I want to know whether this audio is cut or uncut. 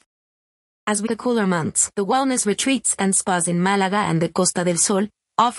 cut